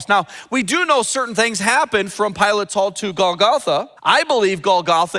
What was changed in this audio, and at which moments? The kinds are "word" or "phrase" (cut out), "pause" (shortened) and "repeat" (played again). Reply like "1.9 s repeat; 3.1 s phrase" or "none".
4.0 s pause